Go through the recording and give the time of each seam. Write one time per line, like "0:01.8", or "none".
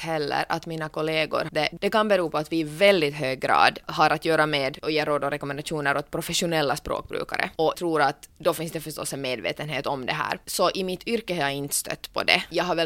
0:01.5
0:07.7